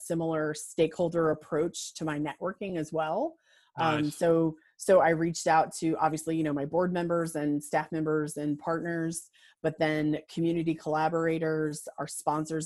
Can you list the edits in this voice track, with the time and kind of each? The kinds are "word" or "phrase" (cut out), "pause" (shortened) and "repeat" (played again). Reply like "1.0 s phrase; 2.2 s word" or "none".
none